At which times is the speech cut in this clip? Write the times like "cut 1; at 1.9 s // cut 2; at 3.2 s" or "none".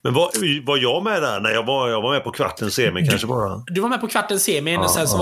none